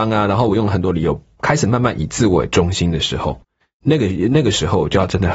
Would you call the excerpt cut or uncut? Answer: uncut